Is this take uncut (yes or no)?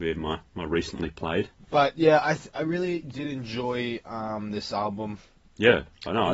yes